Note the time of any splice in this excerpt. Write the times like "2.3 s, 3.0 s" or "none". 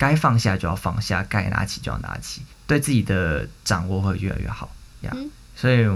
2.5 s, 5.0 s